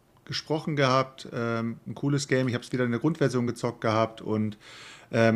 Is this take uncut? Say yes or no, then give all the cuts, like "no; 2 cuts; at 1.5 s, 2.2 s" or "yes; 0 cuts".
yes; 0 cuts